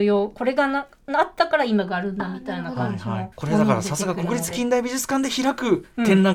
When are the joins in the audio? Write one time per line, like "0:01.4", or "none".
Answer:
0:03.3